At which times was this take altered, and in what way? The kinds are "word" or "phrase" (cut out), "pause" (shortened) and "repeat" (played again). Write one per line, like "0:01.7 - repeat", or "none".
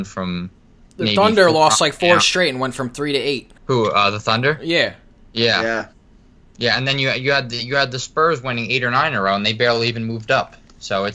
0:03.6 - pause